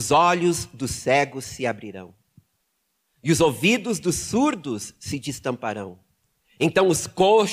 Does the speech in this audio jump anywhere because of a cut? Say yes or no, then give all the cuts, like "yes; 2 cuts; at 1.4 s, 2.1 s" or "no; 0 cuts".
no; 0 cuts